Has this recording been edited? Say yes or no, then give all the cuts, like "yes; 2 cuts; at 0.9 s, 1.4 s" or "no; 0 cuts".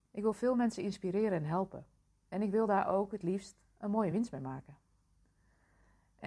no; 0 cuts